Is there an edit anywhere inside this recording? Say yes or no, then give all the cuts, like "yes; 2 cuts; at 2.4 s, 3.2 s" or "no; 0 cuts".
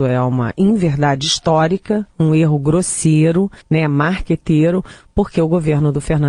yes; 1 cut; at 3.6 s